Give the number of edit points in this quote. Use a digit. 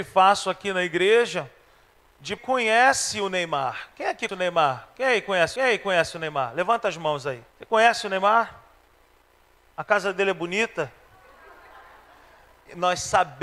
4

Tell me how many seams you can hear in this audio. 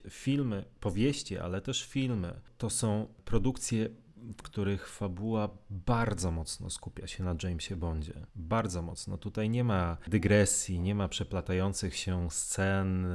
1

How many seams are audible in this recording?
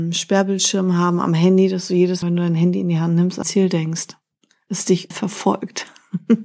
3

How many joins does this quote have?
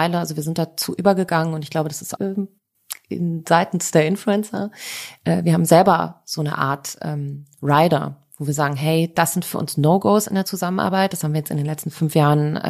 1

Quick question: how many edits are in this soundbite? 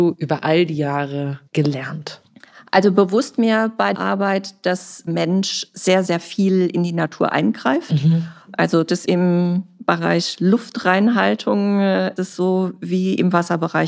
8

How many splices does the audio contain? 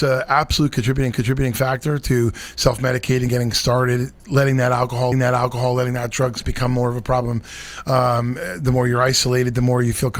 4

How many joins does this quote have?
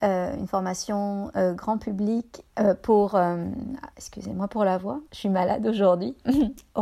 2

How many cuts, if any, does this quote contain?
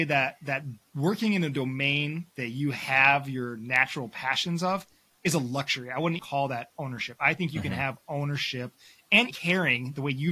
2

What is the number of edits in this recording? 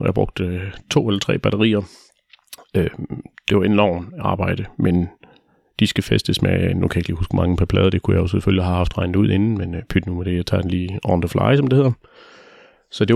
0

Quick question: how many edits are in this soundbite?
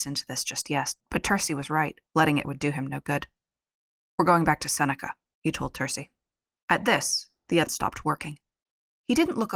4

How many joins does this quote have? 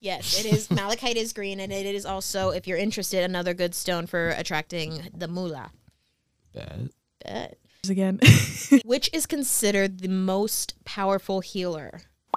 0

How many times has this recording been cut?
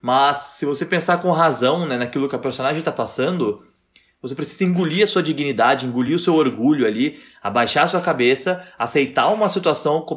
0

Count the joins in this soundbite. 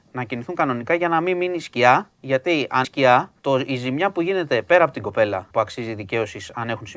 3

